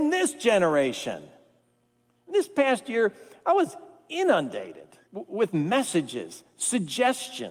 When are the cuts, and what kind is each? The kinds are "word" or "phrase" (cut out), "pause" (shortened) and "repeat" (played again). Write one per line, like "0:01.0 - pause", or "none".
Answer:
0:05.1 - word